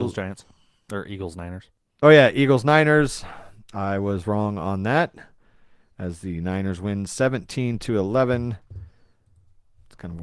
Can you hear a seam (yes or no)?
no